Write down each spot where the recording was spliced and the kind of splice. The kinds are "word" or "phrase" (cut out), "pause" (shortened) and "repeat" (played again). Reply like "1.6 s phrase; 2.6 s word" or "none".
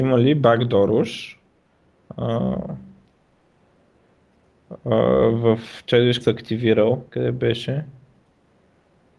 6.2 s word; 7.1 s pause